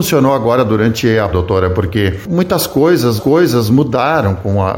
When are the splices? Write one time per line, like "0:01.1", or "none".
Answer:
0:01.3
0:03.2